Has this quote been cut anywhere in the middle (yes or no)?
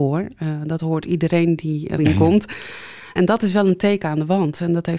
yes